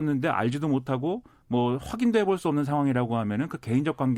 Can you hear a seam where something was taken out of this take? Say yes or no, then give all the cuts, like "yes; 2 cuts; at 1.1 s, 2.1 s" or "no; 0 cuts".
no; 0 cuts